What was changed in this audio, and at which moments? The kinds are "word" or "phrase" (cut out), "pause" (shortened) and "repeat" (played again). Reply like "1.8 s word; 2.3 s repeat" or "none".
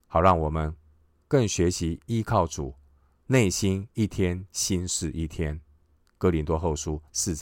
none